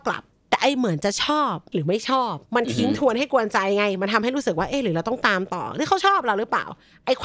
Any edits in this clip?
yes; 2 cuts; at 1.7 s, 2.5 s

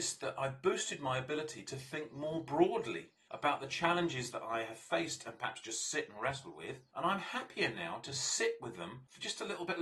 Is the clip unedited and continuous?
yes; 0 cuts

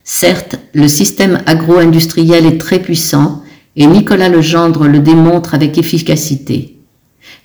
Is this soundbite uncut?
yes; 0 cuts

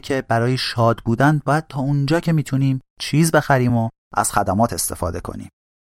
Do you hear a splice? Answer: no; 0 cuts

